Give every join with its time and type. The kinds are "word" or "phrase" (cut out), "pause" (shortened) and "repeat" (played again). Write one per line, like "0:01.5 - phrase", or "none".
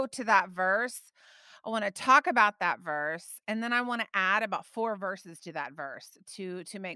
none